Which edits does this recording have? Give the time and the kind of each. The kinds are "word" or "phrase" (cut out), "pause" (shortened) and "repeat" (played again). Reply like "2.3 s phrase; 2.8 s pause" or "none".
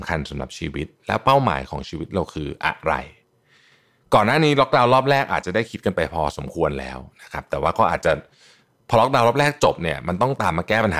none